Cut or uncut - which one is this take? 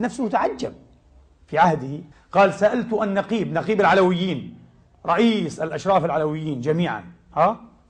cut